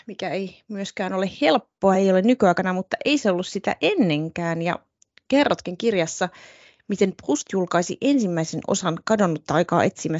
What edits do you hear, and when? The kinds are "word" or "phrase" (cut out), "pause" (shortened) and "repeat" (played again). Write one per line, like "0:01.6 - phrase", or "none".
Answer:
none